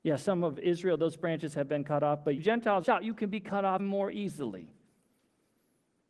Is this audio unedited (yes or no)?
no